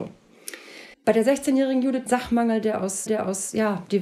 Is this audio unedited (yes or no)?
no